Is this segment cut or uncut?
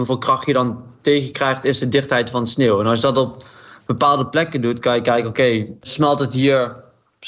uncut